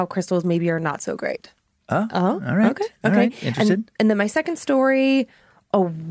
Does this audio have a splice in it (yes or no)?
no